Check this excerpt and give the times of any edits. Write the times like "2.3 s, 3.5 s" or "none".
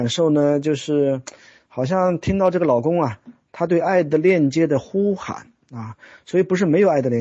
none